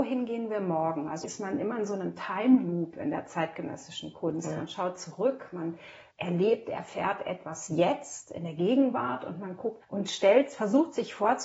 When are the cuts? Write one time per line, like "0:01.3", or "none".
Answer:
0:01.2
0:06.1
0:09.8